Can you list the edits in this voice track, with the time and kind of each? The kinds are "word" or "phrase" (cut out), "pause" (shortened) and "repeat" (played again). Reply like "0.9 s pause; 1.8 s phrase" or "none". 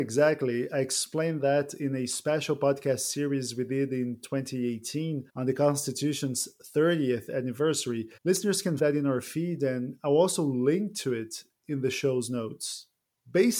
5.3 s pause; 8.2 s pause; 8.8 s word